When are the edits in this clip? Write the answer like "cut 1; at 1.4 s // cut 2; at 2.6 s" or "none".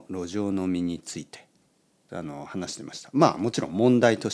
cut 1; at 2.1 s